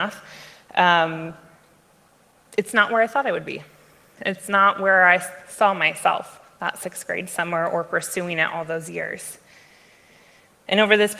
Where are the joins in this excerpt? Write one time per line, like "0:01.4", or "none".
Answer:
none